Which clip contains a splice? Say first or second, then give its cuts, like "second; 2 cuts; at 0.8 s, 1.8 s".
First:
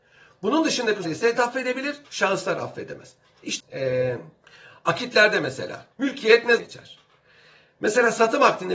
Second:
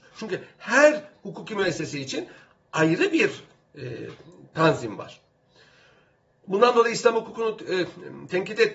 first; 7 cuts; at 1.0 s, 1.4 s, 2.0 s, 3.6 s, 4.4 s, 5.9 s, 6.6 s